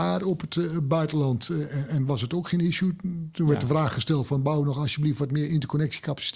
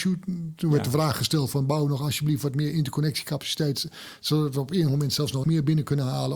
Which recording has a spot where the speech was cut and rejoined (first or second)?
second